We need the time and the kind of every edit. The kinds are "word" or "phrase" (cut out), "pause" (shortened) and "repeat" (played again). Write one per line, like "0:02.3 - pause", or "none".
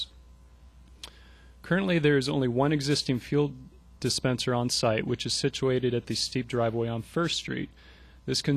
none